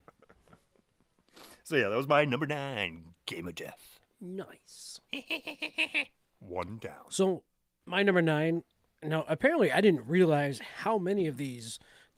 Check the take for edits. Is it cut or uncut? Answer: cut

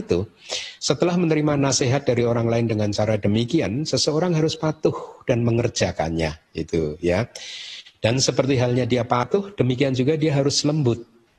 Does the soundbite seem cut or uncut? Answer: uncut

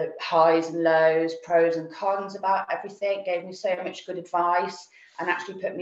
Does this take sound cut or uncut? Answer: uncut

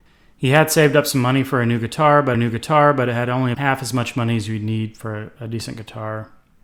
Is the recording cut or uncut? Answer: cut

